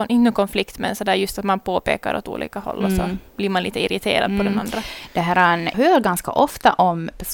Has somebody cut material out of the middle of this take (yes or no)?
yes